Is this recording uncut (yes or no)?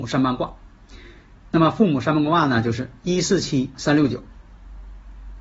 no